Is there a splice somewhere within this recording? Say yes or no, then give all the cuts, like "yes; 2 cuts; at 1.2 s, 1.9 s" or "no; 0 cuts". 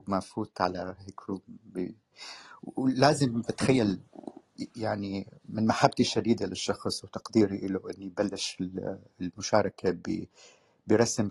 no; 0 cuts